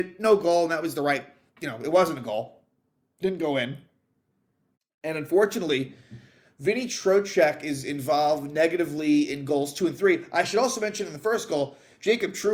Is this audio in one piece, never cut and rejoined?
yes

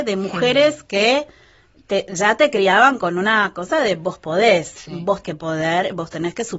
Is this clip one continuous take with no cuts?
no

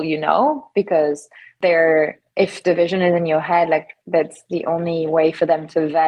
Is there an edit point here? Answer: no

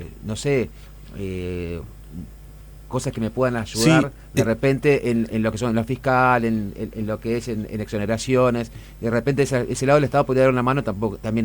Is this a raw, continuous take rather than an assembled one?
no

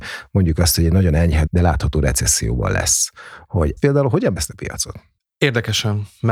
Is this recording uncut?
no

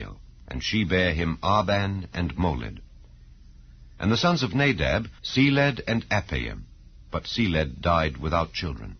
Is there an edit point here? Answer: yes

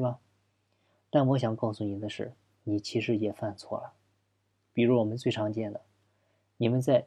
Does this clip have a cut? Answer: no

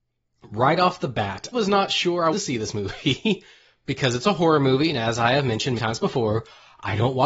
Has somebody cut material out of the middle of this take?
yes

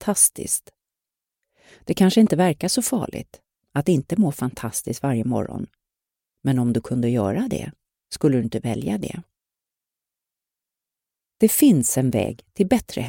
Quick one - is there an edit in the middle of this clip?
no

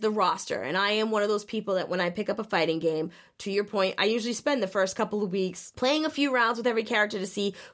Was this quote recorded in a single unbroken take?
yes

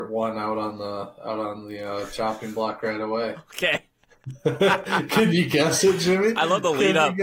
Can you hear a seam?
no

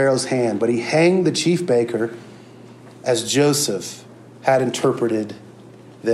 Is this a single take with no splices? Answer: yes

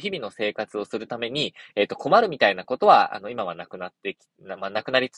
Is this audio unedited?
yes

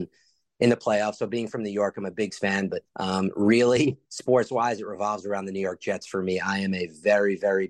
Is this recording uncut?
no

